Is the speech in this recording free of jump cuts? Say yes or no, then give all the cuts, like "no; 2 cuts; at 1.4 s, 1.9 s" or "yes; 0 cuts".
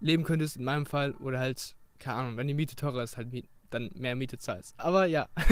yes; 0 cuts